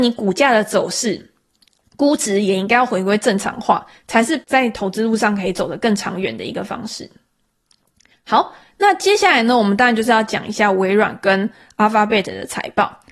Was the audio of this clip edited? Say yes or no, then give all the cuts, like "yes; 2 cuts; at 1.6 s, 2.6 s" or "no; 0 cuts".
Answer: no; 0 cuts